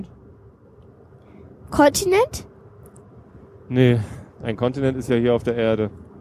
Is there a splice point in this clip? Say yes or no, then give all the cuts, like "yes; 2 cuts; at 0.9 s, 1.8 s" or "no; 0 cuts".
no; 0 cuts